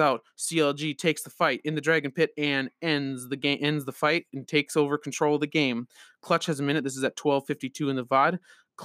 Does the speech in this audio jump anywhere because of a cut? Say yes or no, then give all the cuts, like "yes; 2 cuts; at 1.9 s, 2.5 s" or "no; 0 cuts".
no; 0 cuts